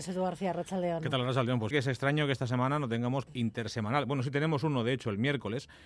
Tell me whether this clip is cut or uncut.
cut